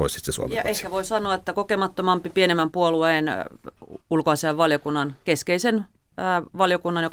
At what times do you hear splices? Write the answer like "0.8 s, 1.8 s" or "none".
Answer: none